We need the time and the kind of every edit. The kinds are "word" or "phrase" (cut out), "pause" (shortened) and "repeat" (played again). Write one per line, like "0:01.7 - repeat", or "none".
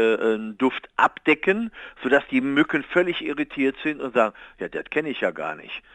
none